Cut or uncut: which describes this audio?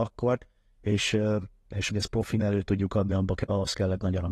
cut